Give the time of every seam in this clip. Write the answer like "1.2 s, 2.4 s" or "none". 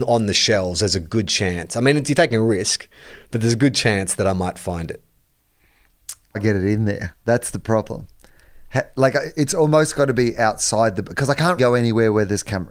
6.3 s, 11.6 s